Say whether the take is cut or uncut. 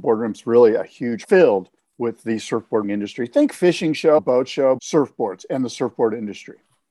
cut